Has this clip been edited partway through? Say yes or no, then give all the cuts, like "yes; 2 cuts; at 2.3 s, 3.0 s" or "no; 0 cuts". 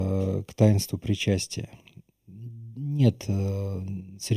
no; 0 cuts